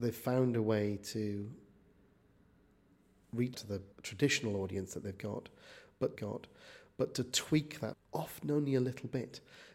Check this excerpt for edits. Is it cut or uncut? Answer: cut